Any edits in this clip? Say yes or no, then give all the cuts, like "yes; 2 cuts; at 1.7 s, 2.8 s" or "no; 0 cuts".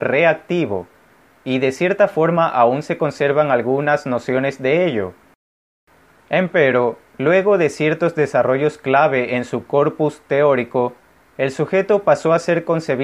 no; 0 cuts